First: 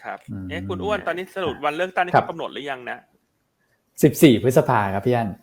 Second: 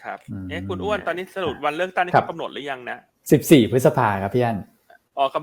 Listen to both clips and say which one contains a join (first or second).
second